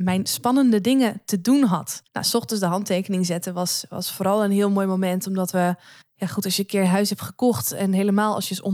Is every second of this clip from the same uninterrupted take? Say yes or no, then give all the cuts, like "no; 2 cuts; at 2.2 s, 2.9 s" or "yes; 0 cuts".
no; 2 cuts; at 2.1 s, 6.0 s